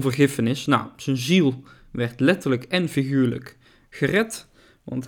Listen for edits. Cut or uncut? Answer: uncut